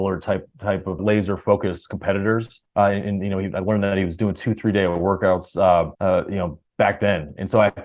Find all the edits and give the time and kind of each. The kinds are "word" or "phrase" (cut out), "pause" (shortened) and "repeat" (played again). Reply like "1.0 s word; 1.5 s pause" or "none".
1.0 s word; 2.7 s pause; 5.9 s pause